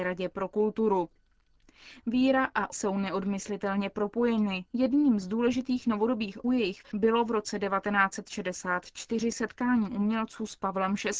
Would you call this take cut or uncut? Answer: cut